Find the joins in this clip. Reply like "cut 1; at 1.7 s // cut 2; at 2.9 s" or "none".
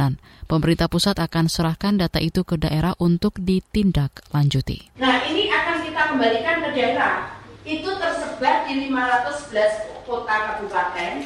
cut 1; at 4.9 s

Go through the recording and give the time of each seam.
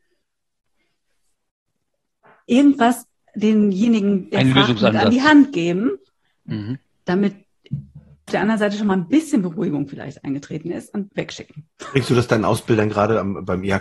cut 1; at 8.3 s // cut 2; at 11.1 s

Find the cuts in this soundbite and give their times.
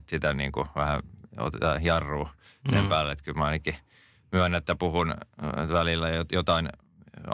none

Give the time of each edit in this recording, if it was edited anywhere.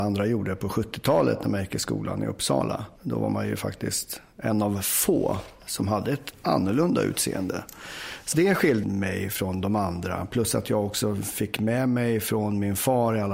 cut 1; at 3.0 s // cut 2; at 8.3 s // cut 3; at 8.8 s

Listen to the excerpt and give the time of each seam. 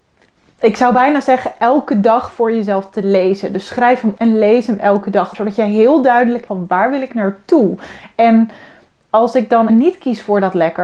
cut 1; at 4.2 s // cut 2; at 5.3 s // cut 3; at 6.5 s // cut 4; at 9.7 s

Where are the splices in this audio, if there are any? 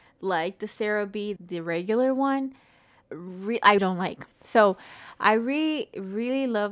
cut 1; at 1.4 s // cut 2; at 3.8 s // cut 3; at 4.3 s

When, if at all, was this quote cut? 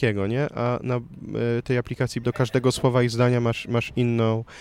cut 1; at 2.2 s

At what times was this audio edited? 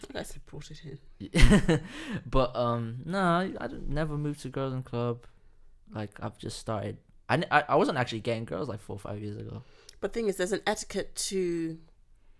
none

